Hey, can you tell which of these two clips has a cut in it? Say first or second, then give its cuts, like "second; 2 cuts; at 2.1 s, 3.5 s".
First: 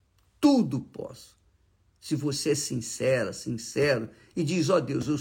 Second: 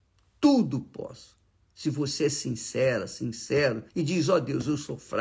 second; 2 cuts; at 1.4 s, 3.9 s